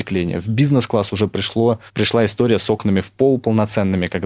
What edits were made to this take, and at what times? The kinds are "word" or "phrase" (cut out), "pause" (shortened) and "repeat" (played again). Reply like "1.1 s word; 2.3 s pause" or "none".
1.9 s pause